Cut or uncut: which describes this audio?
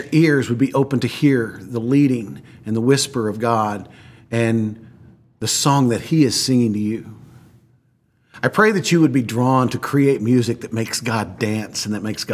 uncut